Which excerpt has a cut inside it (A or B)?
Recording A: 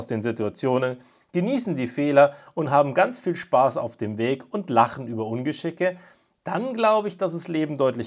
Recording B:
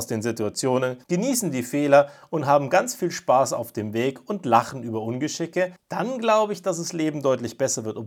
B